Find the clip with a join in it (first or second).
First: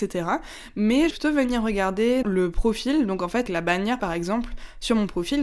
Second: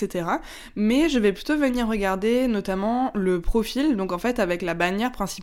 first